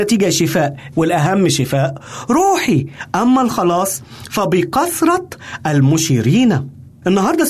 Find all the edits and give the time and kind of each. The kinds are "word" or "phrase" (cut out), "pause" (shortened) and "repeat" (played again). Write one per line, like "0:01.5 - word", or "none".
0:00.9 - word